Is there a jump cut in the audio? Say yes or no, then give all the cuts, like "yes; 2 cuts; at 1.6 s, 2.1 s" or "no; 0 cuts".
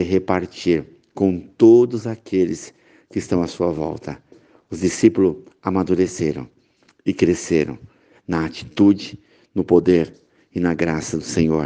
no; 0 cuts